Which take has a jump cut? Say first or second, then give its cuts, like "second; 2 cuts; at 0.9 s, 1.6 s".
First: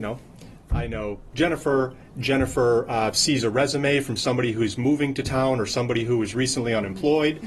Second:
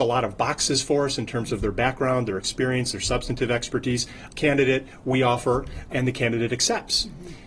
second; 2 cuts; at 4.4 s, 5.9 s